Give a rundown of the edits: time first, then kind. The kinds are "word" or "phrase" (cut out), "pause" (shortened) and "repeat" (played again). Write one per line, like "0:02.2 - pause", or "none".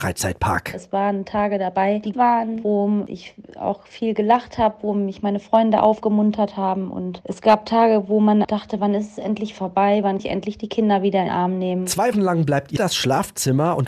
0:02.1 - word
0:08.4 - word
0:10.2 - word
0:11.3 - word
0:12.1 - word
0:12.8 - word